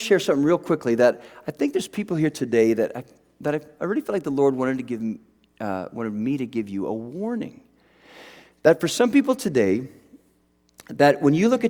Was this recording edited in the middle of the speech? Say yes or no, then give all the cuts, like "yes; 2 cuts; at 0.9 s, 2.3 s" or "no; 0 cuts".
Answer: no; 0 cuts